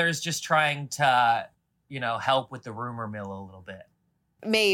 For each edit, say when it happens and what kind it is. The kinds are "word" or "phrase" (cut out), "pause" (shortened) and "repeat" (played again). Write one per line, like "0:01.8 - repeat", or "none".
none